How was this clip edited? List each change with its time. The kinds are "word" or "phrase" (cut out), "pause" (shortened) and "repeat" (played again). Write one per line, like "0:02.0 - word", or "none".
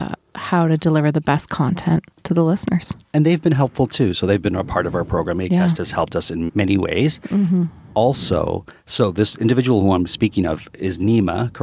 0:06.5 - word